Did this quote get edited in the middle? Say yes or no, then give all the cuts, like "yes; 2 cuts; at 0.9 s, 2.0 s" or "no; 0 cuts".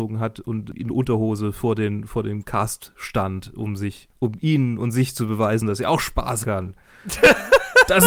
yes; 1 cut; at 6.4 s